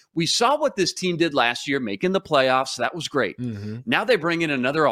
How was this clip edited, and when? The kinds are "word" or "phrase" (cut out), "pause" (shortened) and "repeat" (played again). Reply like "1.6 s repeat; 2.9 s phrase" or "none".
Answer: none